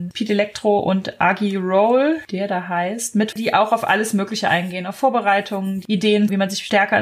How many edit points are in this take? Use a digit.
1